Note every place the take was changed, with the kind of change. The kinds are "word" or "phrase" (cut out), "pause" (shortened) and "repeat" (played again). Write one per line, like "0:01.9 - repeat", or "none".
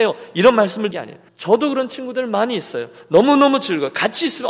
0:00.9 - word
0:01.3 - pause